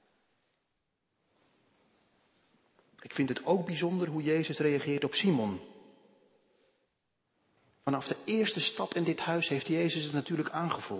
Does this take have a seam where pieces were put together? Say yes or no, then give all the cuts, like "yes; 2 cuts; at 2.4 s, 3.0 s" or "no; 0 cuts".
no; 0 cuts